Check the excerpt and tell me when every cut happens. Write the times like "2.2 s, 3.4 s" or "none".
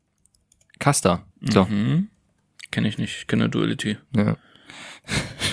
1.3 s